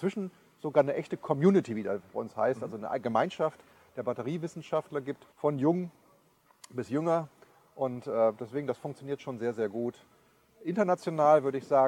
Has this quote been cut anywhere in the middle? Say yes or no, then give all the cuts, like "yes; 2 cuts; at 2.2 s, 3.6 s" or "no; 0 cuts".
yes; 1 cut; at 5.3 s